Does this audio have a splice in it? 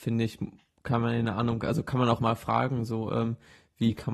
yes; 1 cut; at 2.2 s

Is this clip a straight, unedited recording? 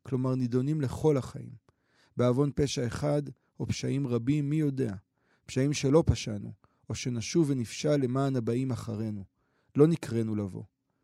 yes; 0 cuts

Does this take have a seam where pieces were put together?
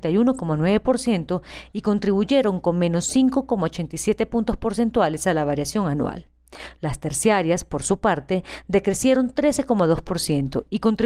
no; 0 cuts

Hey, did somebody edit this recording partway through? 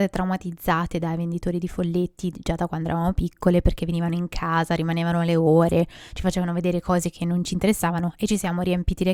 no; 0 cuts

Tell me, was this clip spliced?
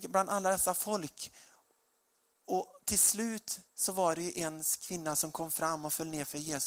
yes; 1 cut; at 3.7 s

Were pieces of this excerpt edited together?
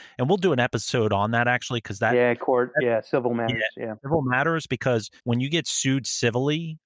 yes; 1 cut; at 5.2 s

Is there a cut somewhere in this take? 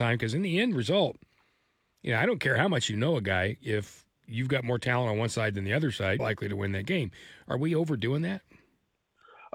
yes; 1 cut; at 6.2 s

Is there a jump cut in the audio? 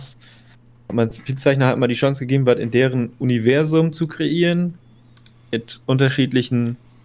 no; 0 cuts

